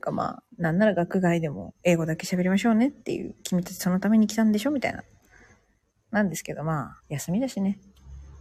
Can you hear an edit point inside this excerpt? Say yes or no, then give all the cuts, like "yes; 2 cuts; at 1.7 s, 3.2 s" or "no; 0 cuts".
yes; 1 cut; at 7.0 s